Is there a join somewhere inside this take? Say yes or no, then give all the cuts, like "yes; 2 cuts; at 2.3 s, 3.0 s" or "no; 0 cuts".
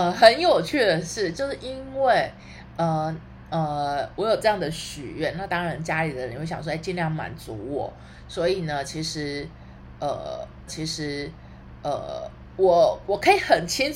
yes; 1 cut; at 10.7 s